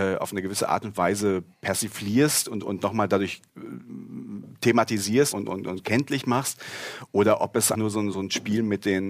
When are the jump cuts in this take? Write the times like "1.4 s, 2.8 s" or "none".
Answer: 1.5 s, 3.5 s, 5.3 s, 7.7 s, 8.1 s